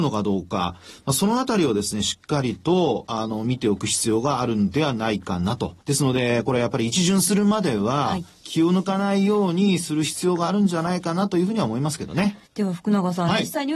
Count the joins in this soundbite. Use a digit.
2